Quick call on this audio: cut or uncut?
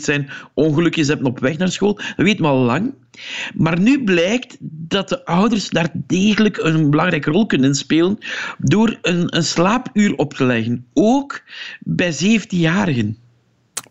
uncut